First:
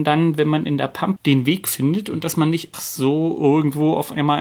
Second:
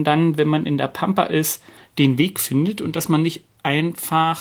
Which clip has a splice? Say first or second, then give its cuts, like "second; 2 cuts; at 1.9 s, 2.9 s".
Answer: first; 2 cuts; at 1.2 s, 2.7 s